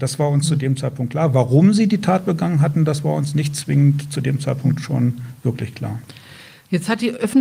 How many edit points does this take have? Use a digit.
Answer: 0